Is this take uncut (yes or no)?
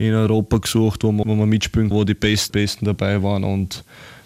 no